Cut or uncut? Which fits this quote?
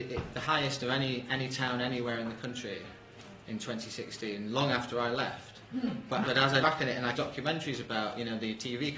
cut